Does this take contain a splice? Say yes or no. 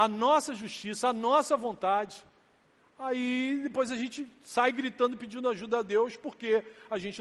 no